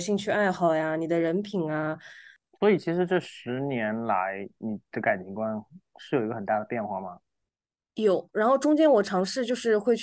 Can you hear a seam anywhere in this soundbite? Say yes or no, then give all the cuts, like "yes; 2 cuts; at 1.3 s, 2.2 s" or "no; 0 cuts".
no; 0 cuts